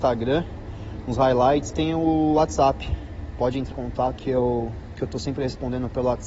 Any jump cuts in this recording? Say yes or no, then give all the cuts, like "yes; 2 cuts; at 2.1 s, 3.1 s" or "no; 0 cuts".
yes; 3 cuts; at 1.7 s, 3.7 s, 4.2 s